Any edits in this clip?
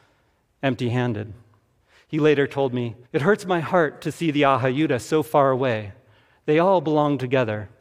yes; 2 cuts; at 1.8 s, 3.1 s

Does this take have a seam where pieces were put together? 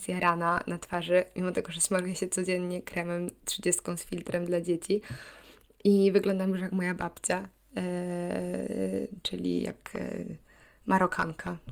no; 0 cuts

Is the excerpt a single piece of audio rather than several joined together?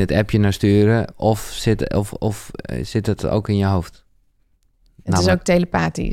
yes; 0 cuts

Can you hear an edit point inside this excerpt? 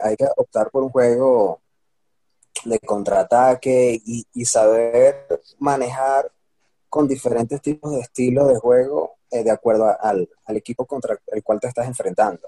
no; 0 cuts

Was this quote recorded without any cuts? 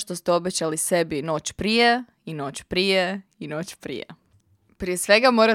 yes; 0 cuts

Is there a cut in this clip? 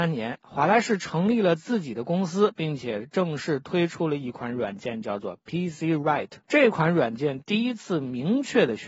yes; 1 cut; at 6.4 s

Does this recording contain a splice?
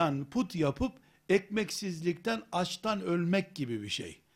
no; 0 cuts

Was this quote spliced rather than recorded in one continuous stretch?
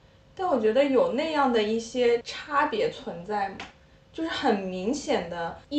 no; 0 cuts

